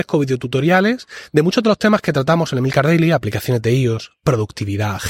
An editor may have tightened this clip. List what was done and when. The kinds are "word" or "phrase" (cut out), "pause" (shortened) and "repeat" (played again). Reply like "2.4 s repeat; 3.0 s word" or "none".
none